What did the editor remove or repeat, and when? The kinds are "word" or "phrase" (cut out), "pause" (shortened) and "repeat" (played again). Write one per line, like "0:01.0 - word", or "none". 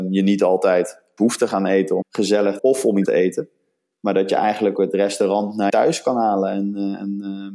0:01.2 - word
0:02.0 - word
0:02.6 - word
0:03.1 - word
0:04.8 - word
0:05.7 - word